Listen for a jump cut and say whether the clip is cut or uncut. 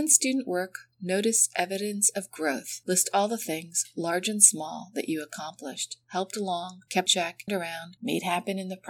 cut